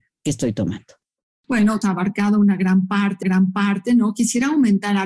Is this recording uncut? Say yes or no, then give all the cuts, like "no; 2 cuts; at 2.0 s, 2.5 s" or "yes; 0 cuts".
no; 2 cuts; at 1.8 s, 3.2 s